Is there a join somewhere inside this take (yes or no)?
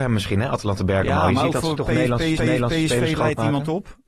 yes